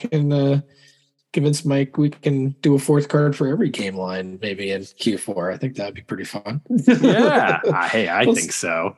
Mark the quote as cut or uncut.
uncut